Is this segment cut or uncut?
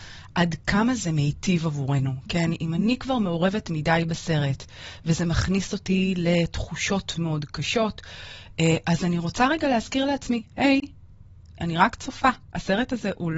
cut